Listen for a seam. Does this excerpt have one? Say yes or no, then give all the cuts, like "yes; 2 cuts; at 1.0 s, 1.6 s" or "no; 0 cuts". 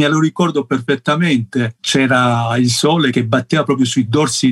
no; 0 cuts